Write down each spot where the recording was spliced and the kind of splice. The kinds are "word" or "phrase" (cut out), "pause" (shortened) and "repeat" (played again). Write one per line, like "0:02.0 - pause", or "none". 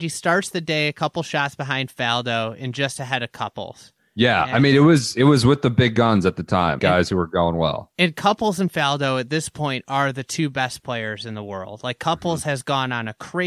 0:06.8 - word